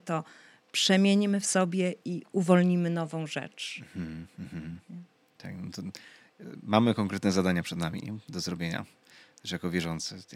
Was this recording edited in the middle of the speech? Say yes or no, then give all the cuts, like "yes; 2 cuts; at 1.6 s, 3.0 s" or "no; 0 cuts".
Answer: no; 0 cuts